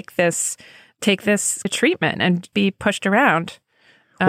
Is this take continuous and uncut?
no; 2 cuts; at 1.6 s, 2.5 s

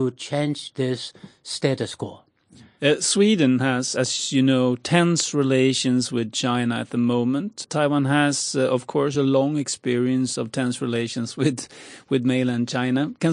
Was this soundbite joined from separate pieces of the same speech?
no; 0 cuts

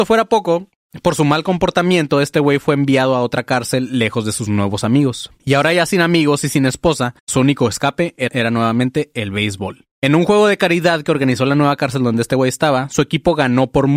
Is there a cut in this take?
yes; 4 cuts; at 5.4 s, 7.2 s, 8.3 s, 9.9 s

